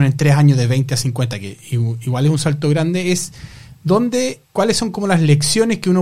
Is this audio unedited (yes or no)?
no